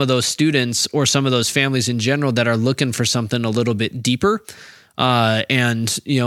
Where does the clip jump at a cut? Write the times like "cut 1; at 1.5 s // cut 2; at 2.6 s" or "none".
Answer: none